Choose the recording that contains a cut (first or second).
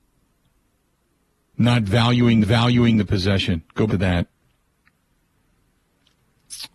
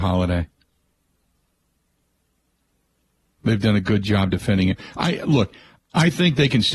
first